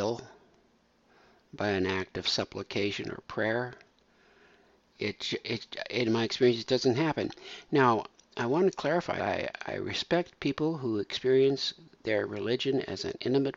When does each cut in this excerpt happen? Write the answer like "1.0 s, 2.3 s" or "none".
9.2 s, 9.6 s

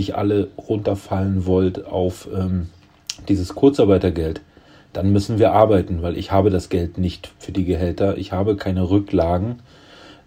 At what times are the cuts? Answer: none

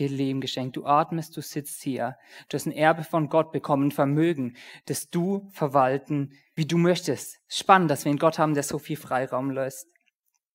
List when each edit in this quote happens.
6.6 s

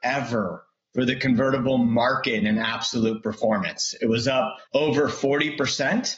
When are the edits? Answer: 4.7 s

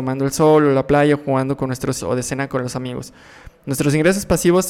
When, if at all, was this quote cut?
2.0 s

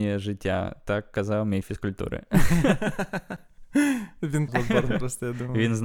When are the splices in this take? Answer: 1.6 s, 4.5 s

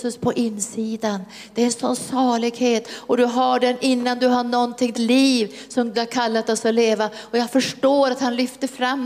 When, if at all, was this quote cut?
4.9 s, 5.9 s

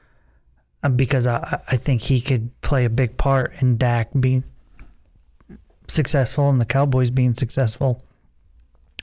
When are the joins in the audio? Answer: none

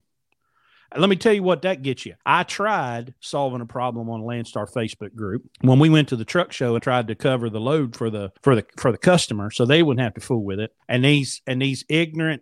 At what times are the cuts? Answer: 2.2 s, 5.5 s, 6.8 s, 8.4 s, 10.8 s

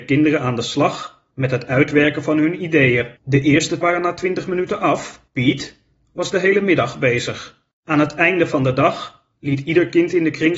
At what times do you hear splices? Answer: 1.3 s, 3.2 s, 3.8 s, 5.3 s, 7.7 s, 9.3 s

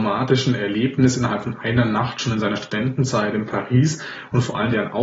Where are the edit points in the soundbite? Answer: none

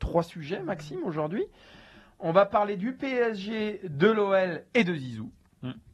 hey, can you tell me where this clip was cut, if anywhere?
none

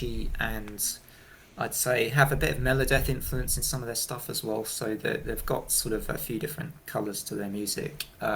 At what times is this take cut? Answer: none

